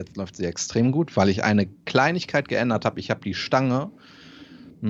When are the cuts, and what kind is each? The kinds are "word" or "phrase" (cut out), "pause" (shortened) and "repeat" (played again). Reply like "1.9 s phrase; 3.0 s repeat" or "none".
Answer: none